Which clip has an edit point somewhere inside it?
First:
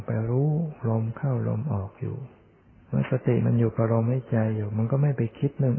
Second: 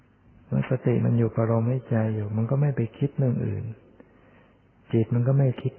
first; 1 cut; at 2.6 s

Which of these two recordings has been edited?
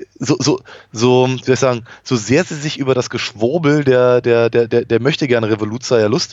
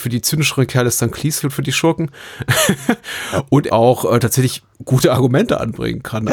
second; 3 cuts; at 1.4 s, 3.7 s, 4.7 s

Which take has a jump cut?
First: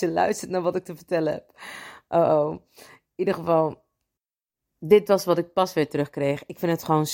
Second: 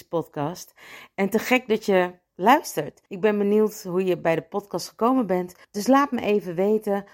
second; 2 cuts; at 3.1 s, 5.6 s

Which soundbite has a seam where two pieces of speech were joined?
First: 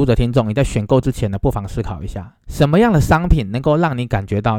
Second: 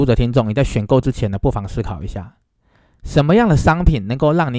first; 1 cut; at 2.4 s

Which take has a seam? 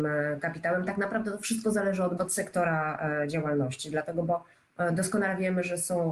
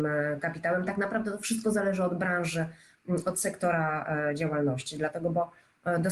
first; 1 cut; at 2.2 s

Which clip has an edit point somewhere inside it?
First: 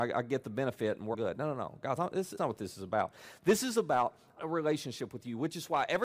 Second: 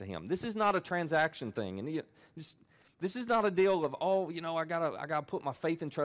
first; 4 cuts; at 1.1 s, 2.0 s, 2.4 s, 4.4 s

